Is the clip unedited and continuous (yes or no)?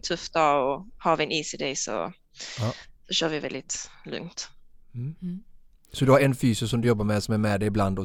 yes